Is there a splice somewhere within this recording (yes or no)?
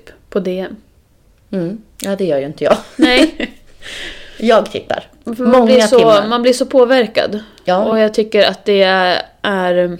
no